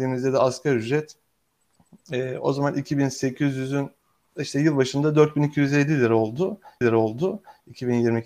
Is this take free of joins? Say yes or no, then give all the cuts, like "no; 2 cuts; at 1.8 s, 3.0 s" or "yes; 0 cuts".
no; 1 cut; at 6.8 s